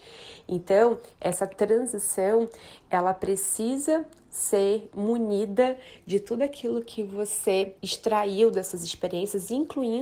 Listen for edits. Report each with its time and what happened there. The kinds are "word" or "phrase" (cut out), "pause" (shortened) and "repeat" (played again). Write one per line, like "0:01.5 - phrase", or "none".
0:07.8 - pause